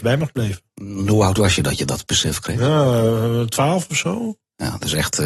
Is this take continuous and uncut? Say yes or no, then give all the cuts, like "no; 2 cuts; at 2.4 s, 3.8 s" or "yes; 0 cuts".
yes; 0 cuts